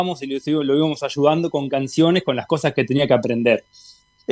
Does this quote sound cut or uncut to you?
uncut